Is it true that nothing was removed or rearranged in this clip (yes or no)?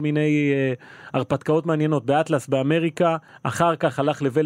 no